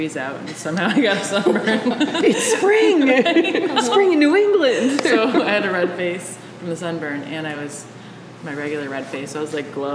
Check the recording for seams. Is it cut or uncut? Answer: uncut